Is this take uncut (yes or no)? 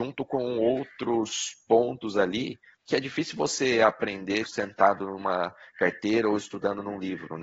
no